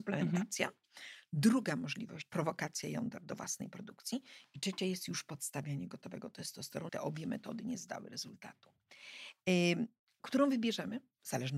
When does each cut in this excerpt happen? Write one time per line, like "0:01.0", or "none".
0:02.3
0:06.9